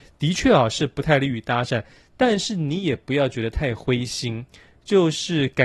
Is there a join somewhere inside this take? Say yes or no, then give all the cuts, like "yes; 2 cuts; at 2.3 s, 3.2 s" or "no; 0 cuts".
no; 0 cuts